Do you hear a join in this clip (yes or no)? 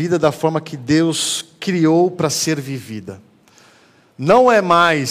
no